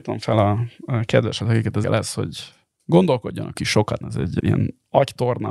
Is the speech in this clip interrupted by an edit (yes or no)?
yes